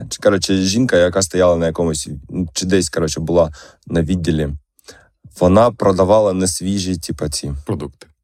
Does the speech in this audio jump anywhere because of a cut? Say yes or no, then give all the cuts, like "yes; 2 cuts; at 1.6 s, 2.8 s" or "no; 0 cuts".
no; 0 cuts